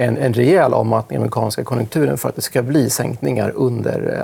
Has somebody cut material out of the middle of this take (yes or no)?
no